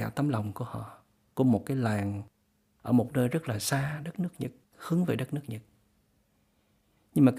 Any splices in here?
no; 0 cuts

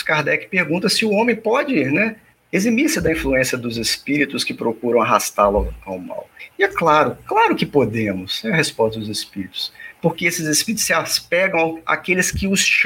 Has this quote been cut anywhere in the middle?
no; 0 cuts

